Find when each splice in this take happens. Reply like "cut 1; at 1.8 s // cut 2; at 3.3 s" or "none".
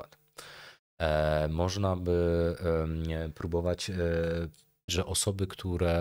cut 1; at 4.9 s